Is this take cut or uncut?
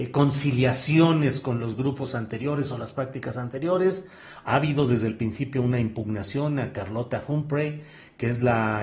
uncut